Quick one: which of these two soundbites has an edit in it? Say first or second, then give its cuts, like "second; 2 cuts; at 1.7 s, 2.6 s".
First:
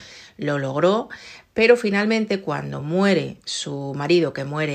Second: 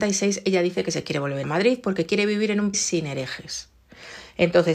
second; 2 cuts; at 1.4 s, 2.7 s